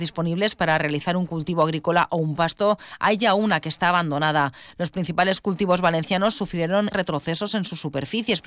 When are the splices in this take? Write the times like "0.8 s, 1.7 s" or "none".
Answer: 6.9 s